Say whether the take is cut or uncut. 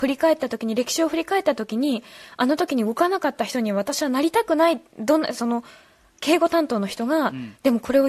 uncut